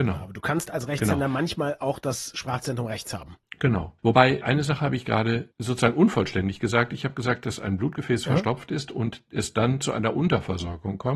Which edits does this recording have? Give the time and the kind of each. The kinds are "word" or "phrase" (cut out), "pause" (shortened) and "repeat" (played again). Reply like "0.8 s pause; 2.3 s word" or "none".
none